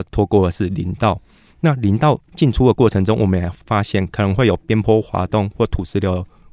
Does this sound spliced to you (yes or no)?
no